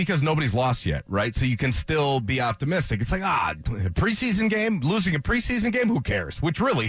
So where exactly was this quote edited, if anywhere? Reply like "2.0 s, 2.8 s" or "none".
none